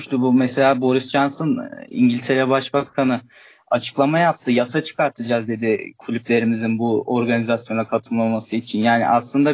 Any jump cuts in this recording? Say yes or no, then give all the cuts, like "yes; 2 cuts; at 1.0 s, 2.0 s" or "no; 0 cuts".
no; 0 cuts